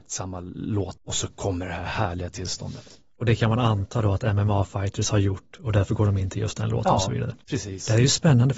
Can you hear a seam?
yes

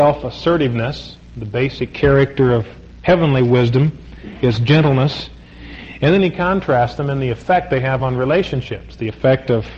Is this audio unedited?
yes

